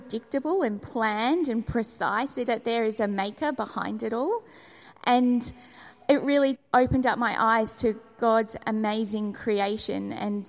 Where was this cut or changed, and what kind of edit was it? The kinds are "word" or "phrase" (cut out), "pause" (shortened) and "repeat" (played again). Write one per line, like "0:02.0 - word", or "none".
0:02.5 - word
0:06.5 - word